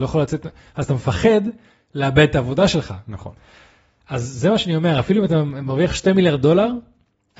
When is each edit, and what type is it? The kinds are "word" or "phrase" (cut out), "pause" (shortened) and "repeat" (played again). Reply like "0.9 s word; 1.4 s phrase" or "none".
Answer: none